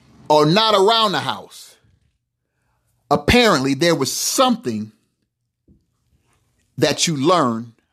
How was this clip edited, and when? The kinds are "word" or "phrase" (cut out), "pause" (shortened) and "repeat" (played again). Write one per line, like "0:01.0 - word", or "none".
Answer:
none

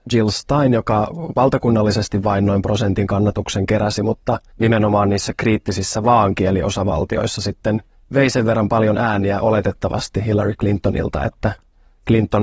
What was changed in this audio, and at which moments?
0:04.5 - pause
0:07.9 - pause

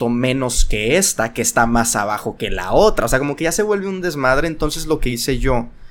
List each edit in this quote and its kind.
none

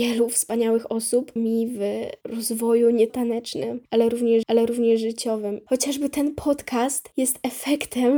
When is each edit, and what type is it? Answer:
0:01.4 - phrase
0:03.1 - word
0:04.4 - repeat

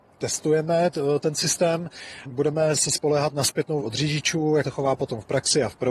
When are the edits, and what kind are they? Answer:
0:02.2 - word
0:03.8 - word
0:04.6 - word

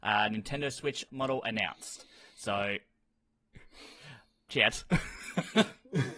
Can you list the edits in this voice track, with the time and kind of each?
0:01.1 - word
0:04.5 - word

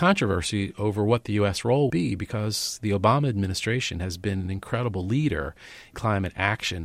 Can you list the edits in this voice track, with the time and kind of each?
0:01.9 - word
0:05.9 - word

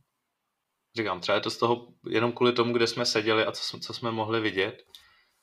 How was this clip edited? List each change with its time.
none

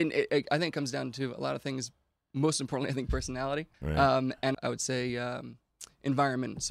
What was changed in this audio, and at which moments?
0:03.7 - pause
0:04.5 - word

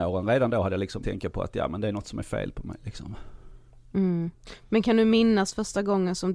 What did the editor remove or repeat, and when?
0:01.0 - word

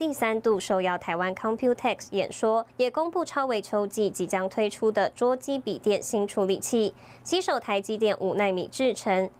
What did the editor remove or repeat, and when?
0:02.7 - pause

